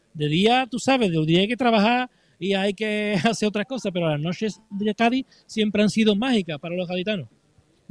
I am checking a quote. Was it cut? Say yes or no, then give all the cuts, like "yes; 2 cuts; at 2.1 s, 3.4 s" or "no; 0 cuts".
no; 0 cuts